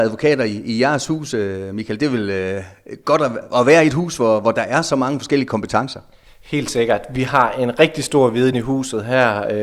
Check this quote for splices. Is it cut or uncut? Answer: uncut